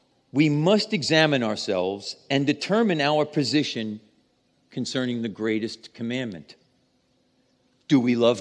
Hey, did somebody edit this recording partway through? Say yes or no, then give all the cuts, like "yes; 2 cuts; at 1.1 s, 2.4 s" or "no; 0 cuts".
no; 0 cuts